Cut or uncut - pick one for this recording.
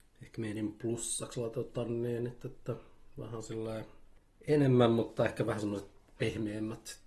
uncut